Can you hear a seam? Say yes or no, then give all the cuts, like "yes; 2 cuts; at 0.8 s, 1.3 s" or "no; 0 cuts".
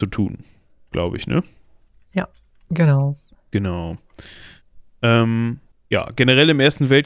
no; 0 cuts